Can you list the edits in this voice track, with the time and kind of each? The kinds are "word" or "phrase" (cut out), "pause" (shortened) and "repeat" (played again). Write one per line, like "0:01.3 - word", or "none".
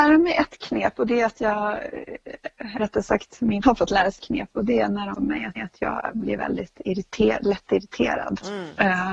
0:02.8 - word
0:03.6 - word
0:04.2 - word
0:05.1 - phrase
0:05.6 - repeat